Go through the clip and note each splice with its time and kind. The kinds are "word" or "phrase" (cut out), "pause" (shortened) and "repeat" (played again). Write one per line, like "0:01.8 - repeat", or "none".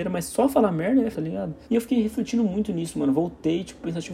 0:01.1 - word
0:01.6 - pause

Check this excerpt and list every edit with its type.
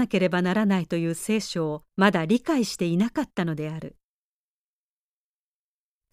0:01.9 - pause

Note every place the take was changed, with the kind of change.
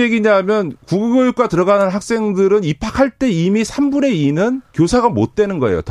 0:04.7 - pause

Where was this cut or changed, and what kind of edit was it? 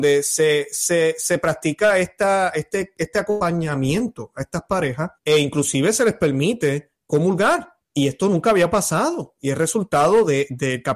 0:05.2 - pause
0:07.8 - pause

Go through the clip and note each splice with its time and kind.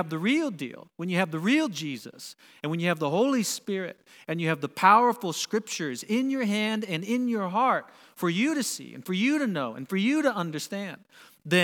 none

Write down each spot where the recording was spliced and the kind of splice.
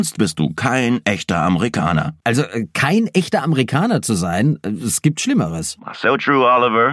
none

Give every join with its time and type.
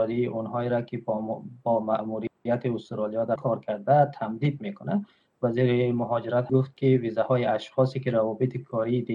0:03.4 - word
0:06.5 - word

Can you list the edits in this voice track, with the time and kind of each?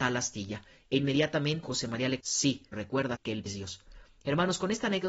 0:01.6 - word
0:02.2 - word
0:02.7 - word
0:03.1 - word
0:03.5 - word

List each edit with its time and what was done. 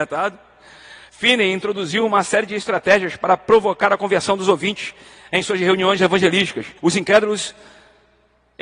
0:06.8 - pause

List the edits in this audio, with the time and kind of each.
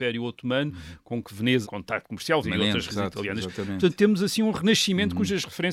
0:01.6 - phrase
0:02.4 - word
0:02.9 - phrase

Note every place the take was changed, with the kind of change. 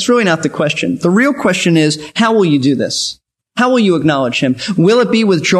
none

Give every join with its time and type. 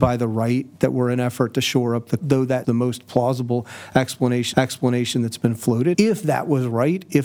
0:02.2 - word
0:02.6 - word
0:04.5 - repeat
0:05.9 - word

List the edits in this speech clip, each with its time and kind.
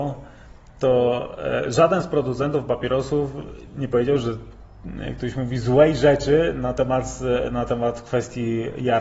none

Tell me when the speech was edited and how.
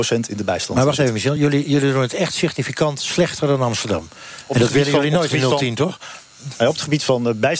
none

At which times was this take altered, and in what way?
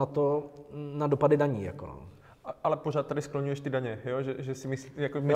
none

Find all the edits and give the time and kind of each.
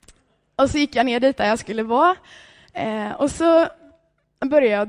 none

